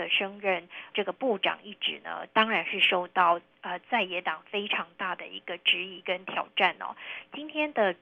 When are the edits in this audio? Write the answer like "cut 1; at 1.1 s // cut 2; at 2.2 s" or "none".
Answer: cut 1; at 0.9 s